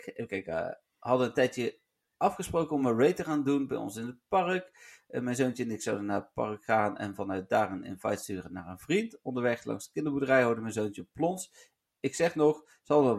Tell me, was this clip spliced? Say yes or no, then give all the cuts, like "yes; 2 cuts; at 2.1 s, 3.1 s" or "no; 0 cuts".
no; 0 cuts